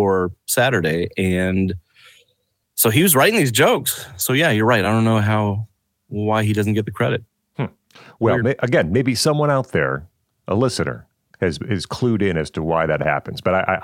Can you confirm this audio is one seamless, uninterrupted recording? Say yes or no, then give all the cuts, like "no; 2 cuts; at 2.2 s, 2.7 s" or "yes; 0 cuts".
yes; 0 cuts